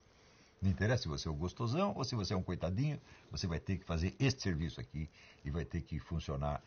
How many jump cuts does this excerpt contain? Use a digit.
0